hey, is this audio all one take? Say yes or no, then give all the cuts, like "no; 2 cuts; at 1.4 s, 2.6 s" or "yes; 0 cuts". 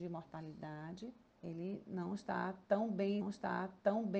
no; 2 cuts; at 1.3 s, 3.2 s